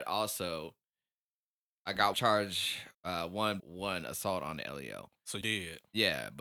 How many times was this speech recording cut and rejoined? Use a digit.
4